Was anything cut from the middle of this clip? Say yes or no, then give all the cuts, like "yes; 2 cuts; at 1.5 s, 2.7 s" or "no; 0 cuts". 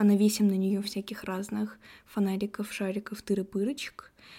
no; 0 cuts